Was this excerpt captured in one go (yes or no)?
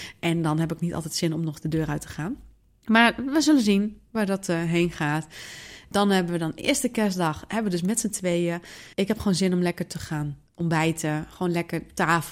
no